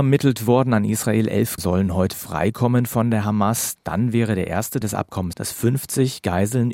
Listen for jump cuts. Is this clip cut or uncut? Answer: cut